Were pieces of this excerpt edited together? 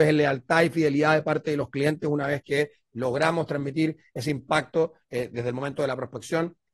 no; 0 cuts

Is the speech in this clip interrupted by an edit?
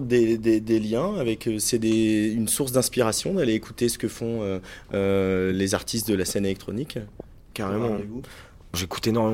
no; 0 cuts

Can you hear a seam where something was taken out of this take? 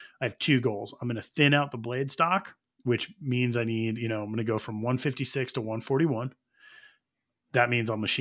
no; 0 cuts

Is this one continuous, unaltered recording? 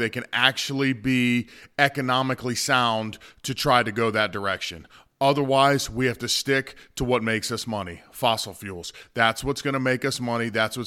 yes; 0 cuts

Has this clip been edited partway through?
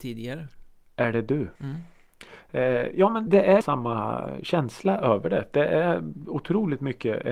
yes; 3 cuts; at 1.6 s, 3.3 s, 3.6 s

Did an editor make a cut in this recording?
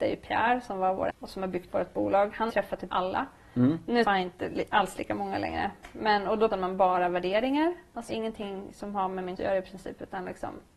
yes; 8 cuts; at 1.1 s, 1.7 s, 2.5 s, 2.9 s, 4.0 s, 6.5 s, 8.1 s, 9.4 s

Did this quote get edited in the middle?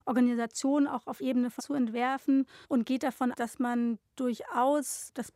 yes; 4 cuts; at 1.2 s, 1.6 s, 2.6 s, 3.3 s

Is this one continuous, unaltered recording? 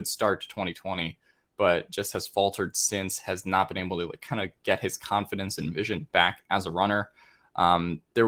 yes; 0 cuts

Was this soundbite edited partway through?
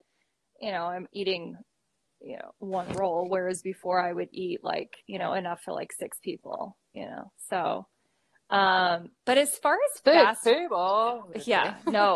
yes; 1 cut; at 5.0 s

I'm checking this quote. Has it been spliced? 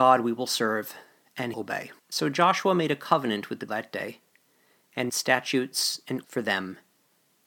yes; 5 cuts; at 1.5 s, 2.0 s, 3.7 s, 5.1 s, 6.2 s

